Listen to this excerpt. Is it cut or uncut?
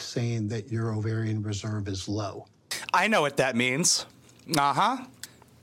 uncut